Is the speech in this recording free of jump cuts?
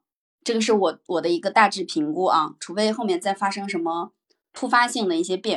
yes; 0 cuts

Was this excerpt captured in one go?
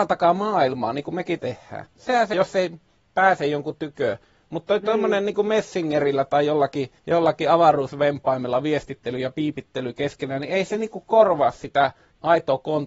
no; 3 cuts; at 1.4 s, 2.3 s, 7.0 s

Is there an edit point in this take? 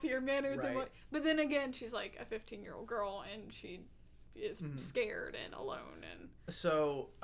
no; 0 cuts

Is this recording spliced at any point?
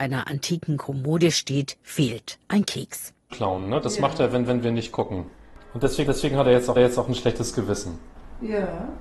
yes; 4 cuts; at 2.4 s, 4.5 s, 6.1 s, 6.8 s

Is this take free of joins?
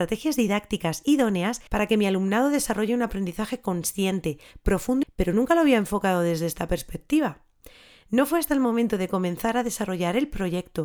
no; 2 cuts; at 1.7 s, 5.0 s

